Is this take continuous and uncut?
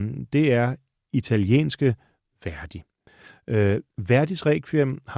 yes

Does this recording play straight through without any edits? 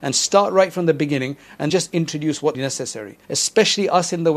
no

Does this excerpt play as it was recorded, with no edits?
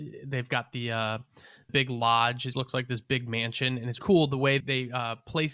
no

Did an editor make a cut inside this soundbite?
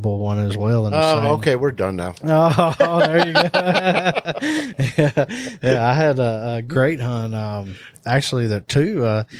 no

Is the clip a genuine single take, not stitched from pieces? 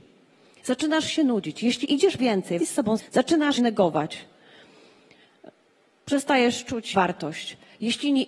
no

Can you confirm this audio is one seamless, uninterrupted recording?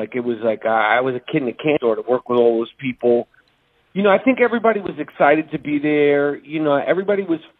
yes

